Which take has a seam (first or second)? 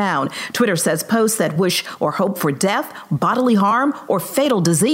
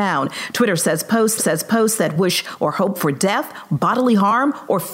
second